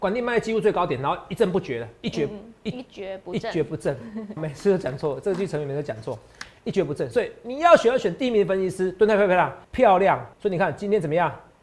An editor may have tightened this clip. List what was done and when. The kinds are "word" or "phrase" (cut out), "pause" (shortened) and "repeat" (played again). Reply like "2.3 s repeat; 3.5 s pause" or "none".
4.4 s word; 9.6 s pause; 10.3 s pause